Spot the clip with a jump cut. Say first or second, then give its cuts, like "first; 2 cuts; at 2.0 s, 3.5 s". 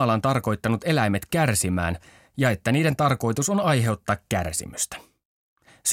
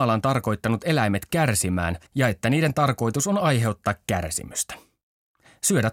second; 1 cut; at 2.1 s